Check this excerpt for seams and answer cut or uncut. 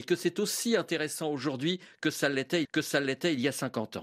cut